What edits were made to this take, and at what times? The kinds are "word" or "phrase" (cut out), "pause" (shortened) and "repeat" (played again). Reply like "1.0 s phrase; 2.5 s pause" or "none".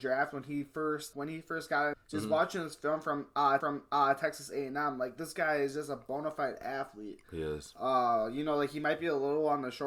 1.1 s word; 1.9 s phrase; 3.6 s repeat